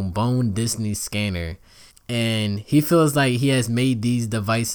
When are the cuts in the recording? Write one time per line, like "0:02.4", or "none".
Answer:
0:01.9